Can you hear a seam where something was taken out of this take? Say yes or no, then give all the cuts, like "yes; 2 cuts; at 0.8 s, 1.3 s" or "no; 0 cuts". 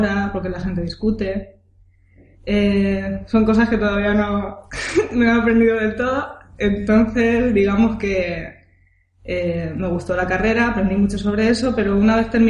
no; 0 cuts